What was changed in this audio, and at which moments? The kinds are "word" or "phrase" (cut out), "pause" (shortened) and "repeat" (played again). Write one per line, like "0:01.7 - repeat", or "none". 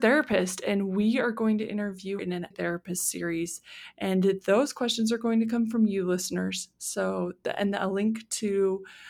0:02.2 - word
0:02.5 - phrase

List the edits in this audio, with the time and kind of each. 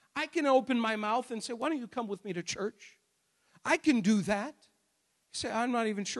none

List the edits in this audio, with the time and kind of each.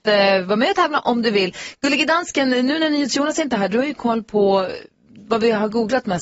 none

